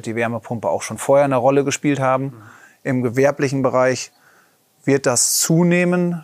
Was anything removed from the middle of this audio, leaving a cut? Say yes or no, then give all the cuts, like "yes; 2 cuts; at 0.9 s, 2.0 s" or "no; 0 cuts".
no; 0 cuts